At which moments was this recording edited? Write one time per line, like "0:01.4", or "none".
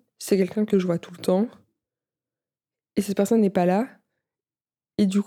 none